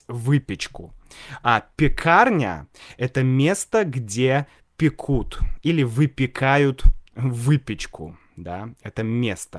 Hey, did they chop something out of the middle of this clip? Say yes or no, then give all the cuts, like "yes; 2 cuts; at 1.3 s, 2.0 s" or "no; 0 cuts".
no; 0 cuts